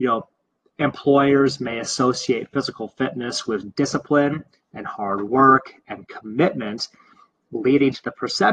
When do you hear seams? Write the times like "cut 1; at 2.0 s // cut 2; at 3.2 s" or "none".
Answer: none